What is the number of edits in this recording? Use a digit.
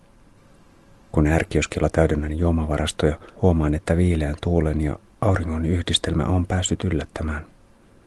1